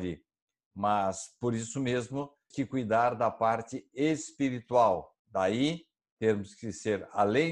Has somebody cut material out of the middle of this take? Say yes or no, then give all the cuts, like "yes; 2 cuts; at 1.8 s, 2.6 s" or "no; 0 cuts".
yes; 2 cuts; at 2.5 s, 5.2 s